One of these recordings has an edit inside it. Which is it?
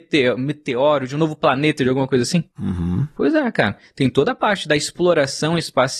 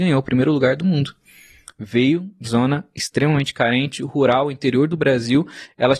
second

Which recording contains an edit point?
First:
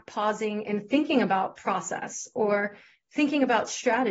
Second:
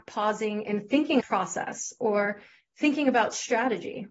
second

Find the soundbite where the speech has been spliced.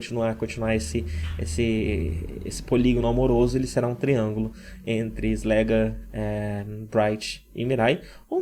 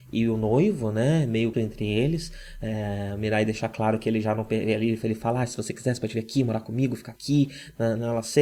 second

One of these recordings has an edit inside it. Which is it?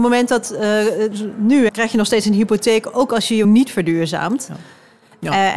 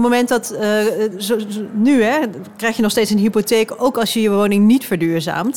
first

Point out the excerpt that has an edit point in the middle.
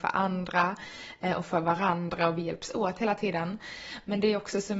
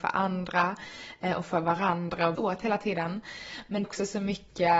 second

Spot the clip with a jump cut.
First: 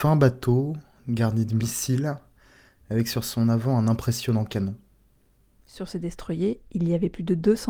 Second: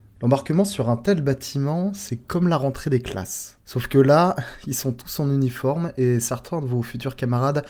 second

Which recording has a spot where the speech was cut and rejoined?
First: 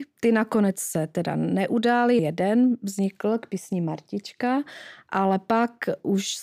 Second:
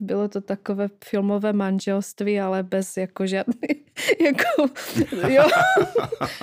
first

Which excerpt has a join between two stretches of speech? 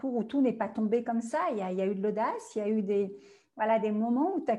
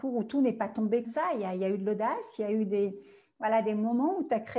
second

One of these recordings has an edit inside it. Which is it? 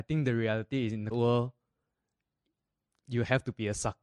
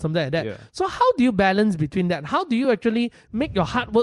first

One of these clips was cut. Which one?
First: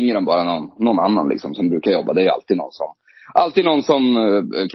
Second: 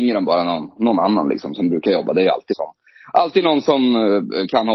second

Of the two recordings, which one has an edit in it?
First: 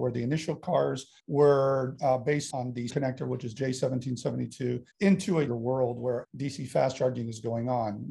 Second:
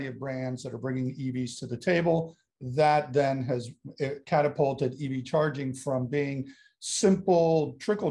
first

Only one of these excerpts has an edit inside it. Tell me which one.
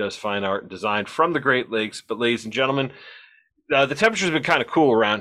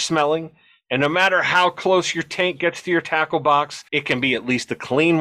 second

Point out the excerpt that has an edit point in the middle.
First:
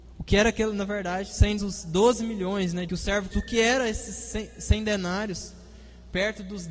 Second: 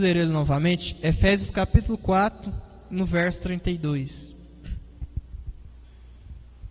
first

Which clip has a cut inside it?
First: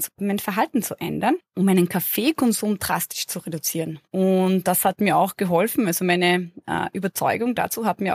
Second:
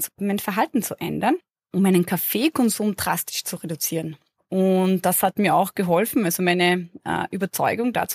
first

